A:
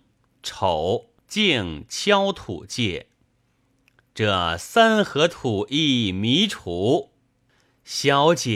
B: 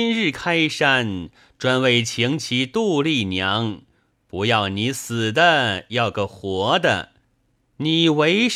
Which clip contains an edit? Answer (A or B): A